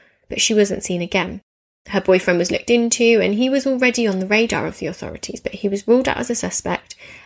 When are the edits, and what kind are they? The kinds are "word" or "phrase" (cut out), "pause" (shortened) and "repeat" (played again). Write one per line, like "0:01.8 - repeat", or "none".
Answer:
none